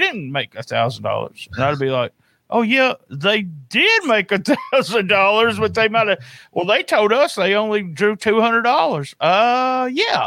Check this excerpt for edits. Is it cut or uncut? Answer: uncut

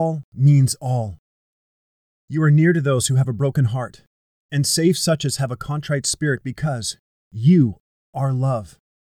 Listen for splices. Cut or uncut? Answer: uncut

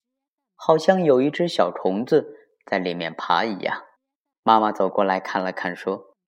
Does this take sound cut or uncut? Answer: cut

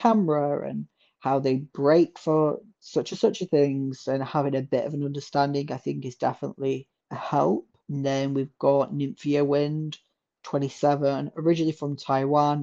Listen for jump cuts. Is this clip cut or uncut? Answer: cut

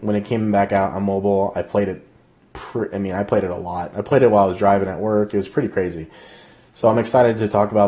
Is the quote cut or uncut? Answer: uncut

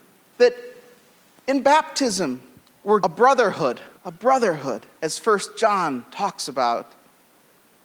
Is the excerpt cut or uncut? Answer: cut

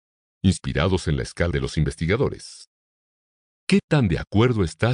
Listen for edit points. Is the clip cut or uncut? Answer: cut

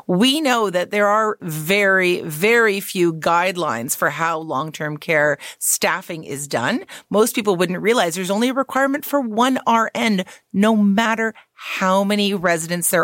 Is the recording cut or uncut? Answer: cut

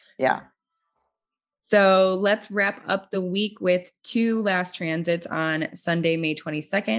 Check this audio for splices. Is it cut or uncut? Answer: uncut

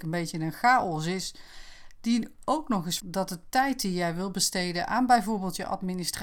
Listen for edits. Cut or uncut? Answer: cut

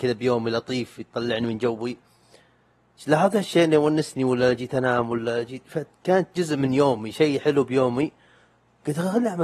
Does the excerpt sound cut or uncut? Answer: uncut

